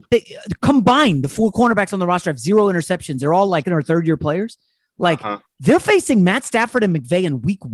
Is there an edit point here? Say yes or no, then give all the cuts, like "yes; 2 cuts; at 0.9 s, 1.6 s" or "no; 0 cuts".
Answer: yes; 1 cut; at 3.6 s